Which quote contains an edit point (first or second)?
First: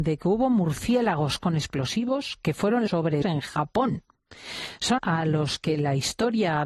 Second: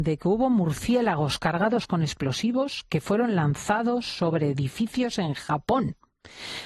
first